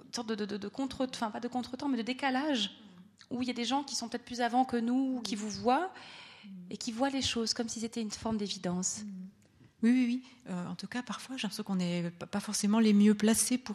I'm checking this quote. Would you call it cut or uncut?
uncut